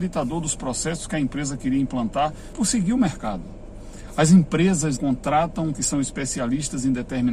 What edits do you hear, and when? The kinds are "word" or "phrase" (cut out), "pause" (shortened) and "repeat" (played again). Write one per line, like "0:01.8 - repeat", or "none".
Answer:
0:02.5 - word
0:05.0 - word
0:05.7 - word